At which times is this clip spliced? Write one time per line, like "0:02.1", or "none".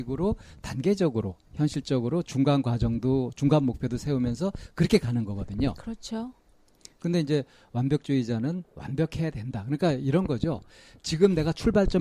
0:01.4